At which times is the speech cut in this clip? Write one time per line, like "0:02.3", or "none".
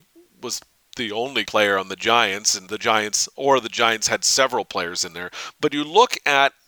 0:01.5
0:02.7